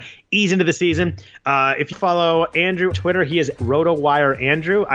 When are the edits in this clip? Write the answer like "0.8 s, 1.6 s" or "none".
1.9 s, 2.9 s, 3.6 s

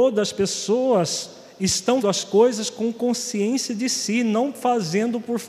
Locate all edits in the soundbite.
2.0 s

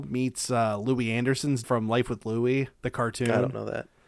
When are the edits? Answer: 1.6 s, 2.7 s

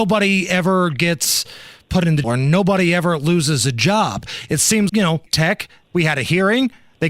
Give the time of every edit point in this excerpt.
2.2 s, 4.9 s, 5.3 s

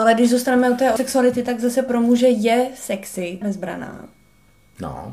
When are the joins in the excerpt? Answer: 1.0 s, 3.4 s

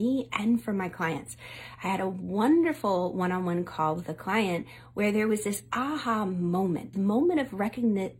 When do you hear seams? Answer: 6.9 s

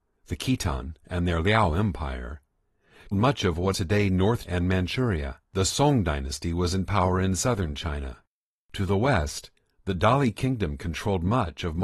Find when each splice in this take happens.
3.1 s, 3.7 s, 4.5 s, 5.4 s, 8.3 s

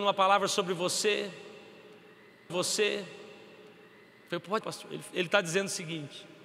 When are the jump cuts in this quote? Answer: 2.5 s, 4.6 s

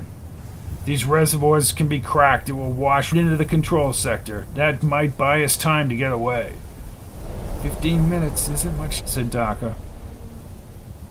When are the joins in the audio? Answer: 3.1 s, 4.8 s, 9.0 s

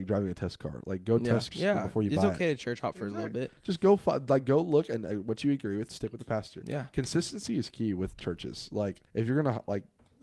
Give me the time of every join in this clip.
1.5 s, 5.9 s, 9.1 s

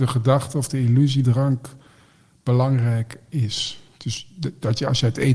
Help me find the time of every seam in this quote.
1.2 s

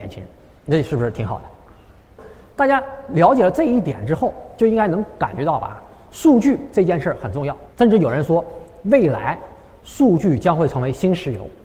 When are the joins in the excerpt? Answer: 7.7 s

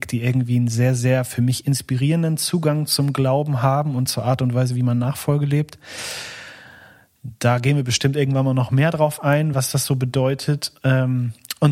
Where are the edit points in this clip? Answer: none

